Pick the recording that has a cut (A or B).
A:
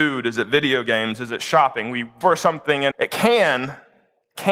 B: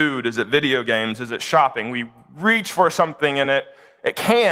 A